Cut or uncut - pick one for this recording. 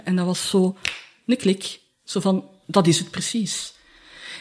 uncut